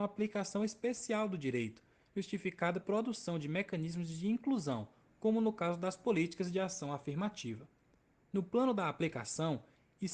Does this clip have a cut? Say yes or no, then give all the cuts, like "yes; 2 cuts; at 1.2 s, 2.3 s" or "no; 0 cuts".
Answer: yes; 1 cut; at 2.8 s